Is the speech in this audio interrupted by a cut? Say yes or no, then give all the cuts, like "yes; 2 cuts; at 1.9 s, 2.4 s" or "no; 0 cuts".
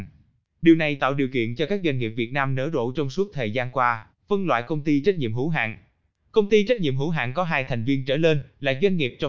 yes; 1 cut; at 4.2 s